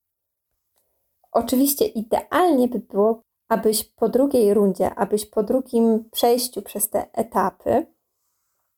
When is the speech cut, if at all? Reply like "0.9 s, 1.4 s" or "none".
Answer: none